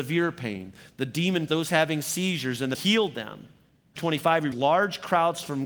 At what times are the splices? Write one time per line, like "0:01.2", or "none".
0:01.5
0:02.7
0:04.0
0:04.5